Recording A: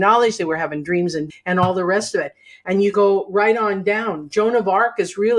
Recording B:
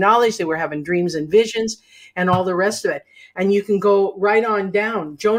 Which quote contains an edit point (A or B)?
A